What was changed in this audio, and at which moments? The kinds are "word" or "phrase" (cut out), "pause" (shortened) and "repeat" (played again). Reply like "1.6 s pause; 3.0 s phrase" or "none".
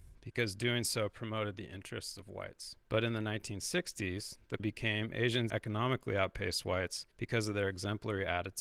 2.8 s pause; 4.6 s phrase; 5.5 s word; 7.1 s pause